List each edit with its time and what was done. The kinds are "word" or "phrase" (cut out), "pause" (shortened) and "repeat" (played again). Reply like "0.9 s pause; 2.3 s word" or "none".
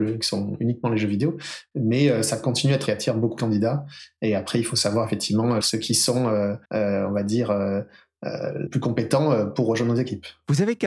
2.9 s phrase; 5.6 s word; 6.6 s pause; 8.7 s word

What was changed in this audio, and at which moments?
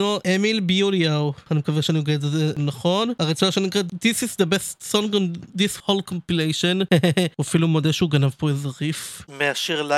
none

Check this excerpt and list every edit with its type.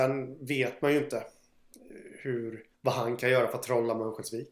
2.7 s pause

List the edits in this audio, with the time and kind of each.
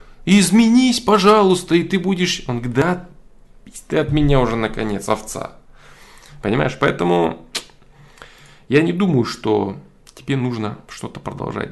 none

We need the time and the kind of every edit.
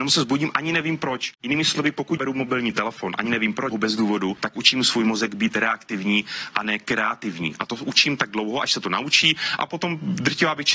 1.3 s pause; 2.2 s word; 3.7 s word

